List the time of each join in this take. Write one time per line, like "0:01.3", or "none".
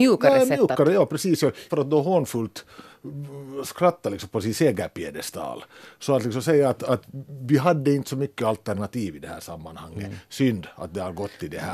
0:01.7